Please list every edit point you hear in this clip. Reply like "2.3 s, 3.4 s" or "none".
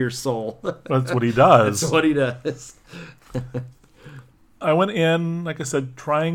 none